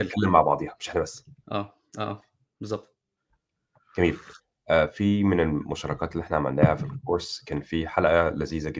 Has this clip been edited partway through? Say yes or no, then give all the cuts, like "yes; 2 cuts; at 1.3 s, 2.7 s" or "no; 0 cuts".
no; 0 cuts